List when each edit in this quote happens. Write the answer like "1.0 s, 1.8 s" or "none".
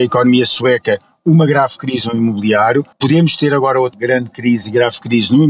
2.9 s, 3.9 s